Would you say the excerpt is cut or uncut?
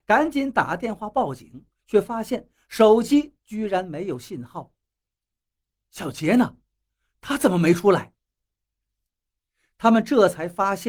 uncut